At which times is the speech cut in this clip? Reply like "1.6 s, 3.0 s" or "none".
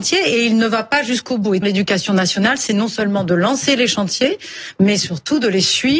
1.6 s